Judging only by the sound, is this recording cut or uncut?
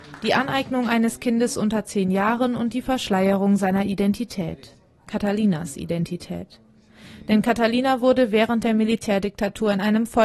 uncut